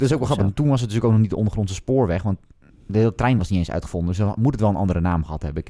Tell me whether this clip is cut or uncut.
uncut